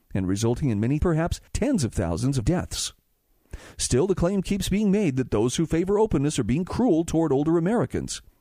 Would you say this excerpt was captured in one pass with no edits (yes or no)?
no